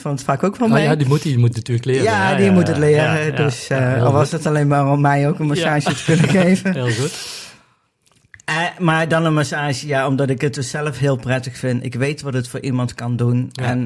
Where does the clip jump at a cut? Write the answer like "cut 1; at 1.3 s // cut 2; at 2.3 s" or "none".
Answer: none